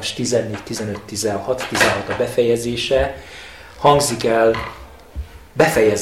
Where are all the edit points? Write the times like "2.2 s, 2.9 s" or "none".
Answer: none